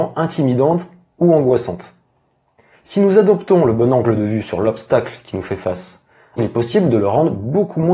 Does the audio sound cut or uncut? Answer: cut